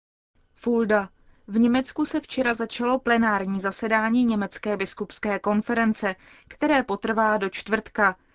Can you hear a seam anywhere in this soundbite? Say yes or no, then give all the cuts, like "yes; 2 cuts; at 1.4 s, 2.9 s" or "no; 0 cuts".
no; 0 cuts